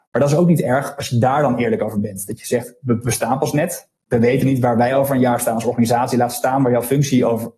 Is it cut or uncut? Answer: uncut